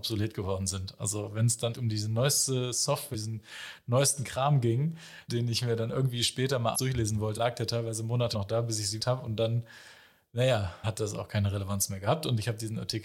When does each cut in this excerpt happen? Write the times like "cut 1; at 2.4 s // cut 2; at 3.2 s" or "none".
cut 1; at 1.7 s // cut 2; at 3.1 s // cut 3; at 5.3 s // cut 4; at 6.7 s // cut 5; at 7.4 s // cut 6; at 8.3 s // cut 7; at 9.0 s // cut 8; at 10.8 s